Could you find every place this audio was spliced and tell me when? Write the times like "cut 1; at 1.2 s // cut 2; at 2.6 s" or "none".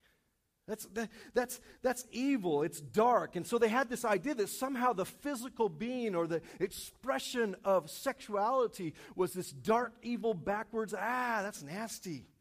none